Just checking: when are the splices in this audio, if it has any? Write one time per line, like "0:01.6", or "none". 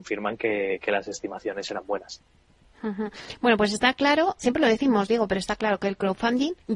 0:04.4